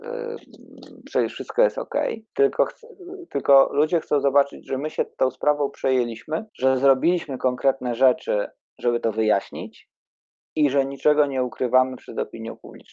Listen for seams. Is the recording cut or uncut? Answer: cut